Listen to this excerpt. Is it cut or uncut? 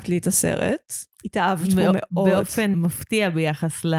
cut